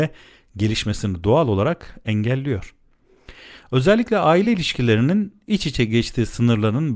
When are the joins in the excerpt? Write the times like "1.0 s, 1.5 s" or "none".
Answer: none